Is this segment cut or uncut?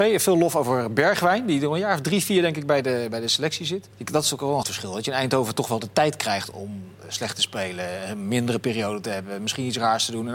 cut